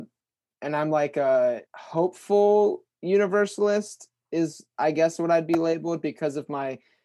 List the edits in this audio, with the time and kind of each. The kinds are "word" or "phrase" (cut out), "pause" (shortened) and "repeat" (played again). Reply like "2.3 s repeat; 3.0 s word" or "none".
1.7 s pause